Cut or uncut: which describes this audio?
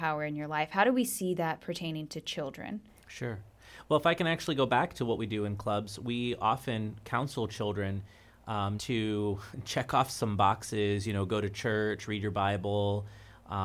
cut